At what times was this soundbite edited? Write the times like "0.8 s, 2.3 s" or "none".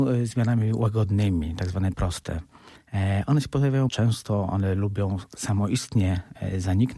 1.9 s, 3.9 s